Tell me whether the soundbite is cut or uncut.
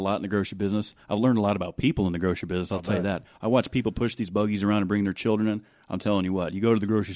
uncut